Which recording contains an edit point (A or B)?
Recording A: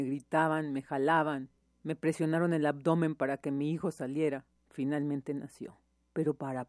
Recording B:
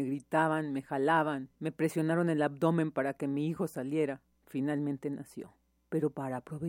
B